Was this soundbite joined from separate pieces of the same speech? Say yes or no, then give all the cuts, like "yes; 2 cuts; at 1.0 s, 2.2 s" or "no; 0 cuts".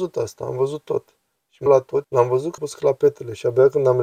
yes; 3 cuts; at 1.7 s, 2.0 s, 2.6 s